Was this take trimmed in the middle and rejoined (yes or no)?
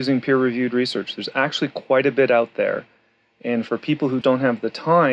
yes